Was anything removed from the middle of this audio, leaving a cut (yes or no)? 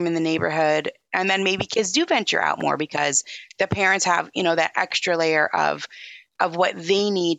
no